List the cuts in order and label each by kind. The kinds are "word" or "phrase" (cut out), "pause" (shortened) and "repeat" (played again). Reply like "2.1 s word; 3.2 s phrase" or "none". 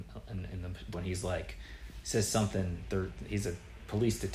0.9 s word

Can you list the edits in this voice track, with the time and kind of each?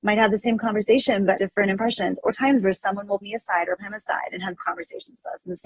1.4 s word; 2.3 s word; 3.2 s word; 3.8 s word; 4.6 s word

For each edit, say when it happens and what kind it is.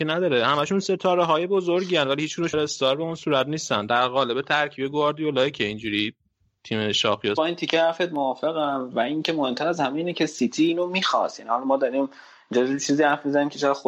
2.5 s word; 7.4 s phrase

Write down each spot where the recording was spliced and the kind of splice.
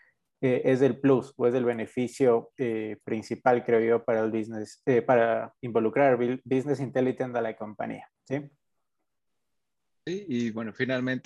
8.2 s pause

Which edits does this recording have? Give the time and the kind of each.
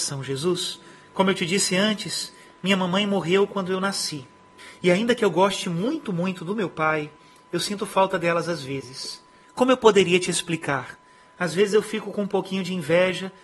none

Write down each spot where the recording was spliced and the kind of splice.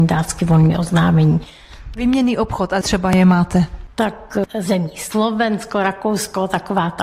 2.8 s phrase

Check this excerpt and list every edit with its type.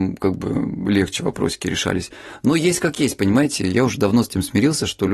none

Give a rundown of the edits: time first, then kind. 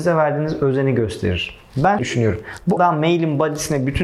2.0 s word; 2.8 s word

